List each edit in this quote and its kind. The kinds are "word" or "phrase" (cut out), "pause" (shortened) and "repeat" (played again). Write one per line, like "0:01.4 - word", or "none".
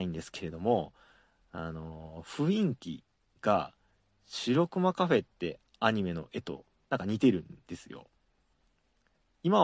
none

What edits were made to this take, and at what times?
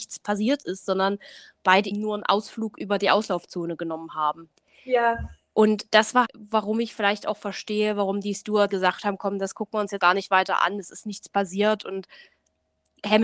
0:01.9 - word
0:06.2 - word
0:08.7 - word
0:10.0 - word

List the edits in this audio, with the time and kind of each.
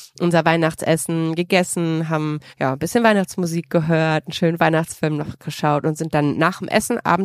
0:02.5 - pause

